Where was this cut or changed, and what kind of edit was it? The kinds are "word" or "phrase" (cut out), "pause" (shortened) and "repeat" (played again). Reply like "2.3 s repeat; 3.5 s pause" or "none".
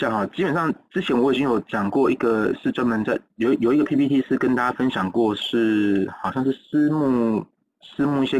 none